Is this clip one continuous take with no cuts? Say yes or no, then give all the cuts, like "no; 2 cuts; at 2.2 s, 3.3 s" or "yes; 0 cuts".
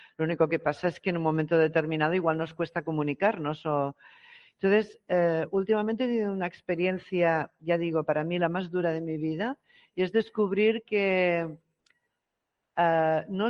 yes; 0 cuts